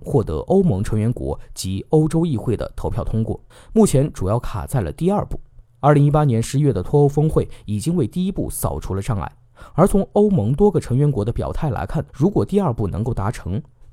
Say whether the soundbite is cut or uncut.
cut